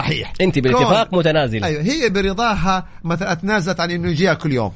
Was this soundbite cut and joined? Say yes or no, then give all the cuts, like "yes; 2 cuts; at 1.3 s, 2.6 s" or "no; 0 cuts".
no; 0 cuts